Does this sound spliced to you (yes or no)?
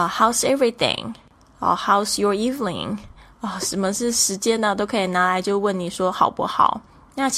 no